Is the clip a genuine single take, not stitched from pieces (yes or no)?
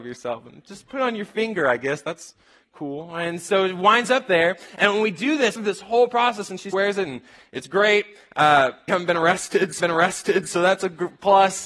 no